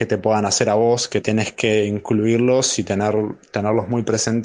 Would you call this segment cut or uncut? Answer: cut